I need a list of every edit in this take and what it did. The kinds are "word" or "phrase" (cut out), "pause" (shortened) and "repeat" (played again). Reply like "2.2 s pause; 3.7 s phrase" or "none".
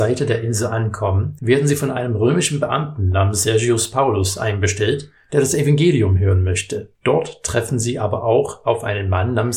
6.9 s pause